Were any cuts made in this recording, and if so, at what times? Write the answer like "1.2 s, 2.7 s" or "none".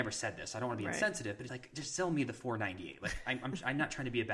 1.5 s